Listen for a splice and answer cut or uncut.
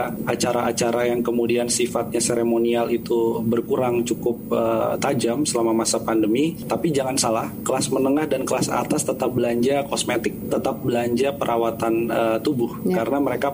uncut